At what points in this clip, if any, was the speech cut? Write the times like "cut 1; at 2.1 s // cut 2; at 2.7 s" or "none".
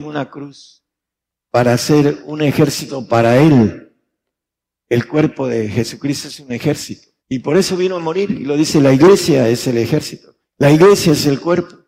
cut 1; at 7.2 s // cut 2; at 10.5 s